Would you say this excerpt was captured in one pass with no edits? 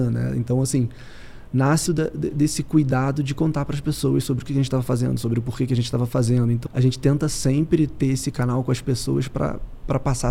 no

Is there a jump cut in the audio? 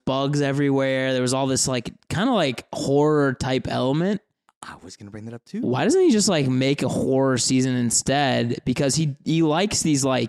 no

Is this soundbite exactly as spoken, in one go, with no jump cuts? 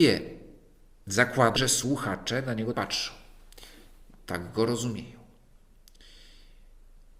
no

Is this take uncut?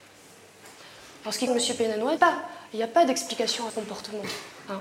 no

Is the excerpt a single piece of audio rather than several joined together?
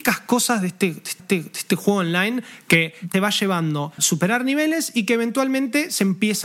no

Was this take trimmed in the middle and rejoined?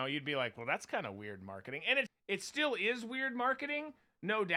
yes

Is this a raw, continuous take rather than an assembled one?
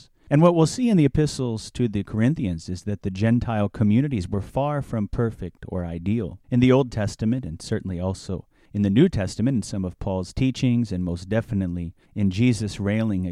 no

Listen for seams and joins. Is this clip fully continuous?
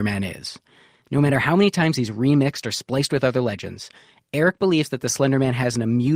yes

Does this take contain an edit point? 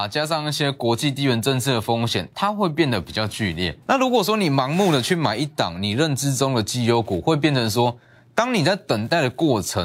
yes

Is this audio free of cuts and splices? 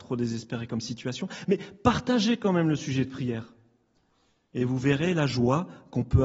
yes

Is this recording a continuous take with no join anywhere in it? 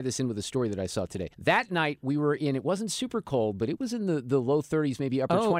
no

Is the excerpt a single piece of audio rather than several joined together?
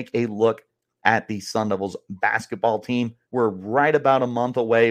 no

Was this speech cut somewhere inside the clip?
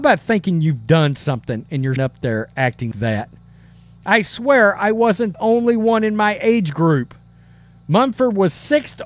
yes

